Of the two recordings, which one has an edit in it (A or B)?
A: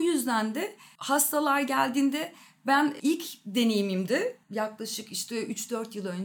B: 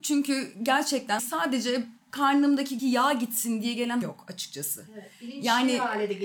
B